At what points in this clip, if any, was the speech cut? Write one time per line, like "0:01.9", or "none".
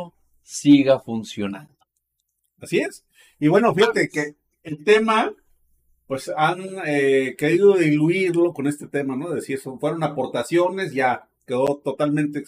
none